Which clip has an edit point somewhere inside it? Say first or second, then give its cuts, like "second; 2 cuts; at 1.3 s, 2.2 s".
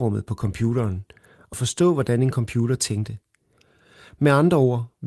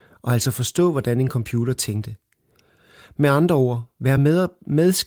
first; 1 cut; at 1.5 s